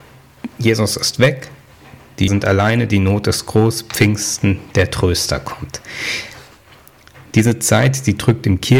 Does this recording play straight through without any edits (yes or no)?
no